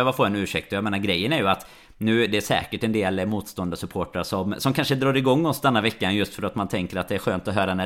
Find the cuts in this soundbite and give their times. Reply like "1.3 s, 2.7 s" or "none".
none